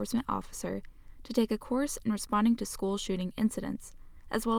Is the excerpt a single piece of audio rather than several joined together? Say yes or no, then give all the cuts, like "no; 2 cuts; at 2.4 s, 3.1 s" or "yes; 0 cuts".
yes; 0 cuts